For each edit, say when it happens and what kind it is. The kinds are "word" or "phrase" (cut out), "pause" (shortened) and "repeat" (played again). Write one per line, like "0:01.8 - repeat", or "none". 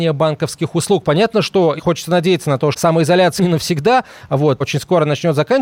0:01.8 - word
0:02.7 - word
0:03.4 - word
0:04.6 - word